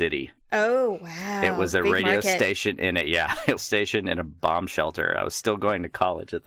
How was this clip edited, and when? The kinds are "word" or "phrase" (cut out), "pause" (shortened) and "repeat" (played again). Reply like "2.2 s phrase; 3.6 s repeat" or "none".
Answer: 3.6 s phrase